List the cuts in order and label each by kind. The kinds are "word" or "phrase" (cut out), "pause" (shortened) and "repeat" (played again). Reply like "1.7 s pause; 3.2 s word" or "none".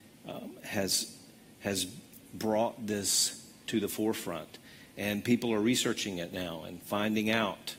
2.2 s pause; 3.6 s word